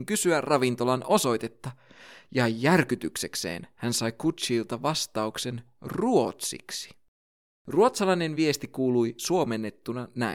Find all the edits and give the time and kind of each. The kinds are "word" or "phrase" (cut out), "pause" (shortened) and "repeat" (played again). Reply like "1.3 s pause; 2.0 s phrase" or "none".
none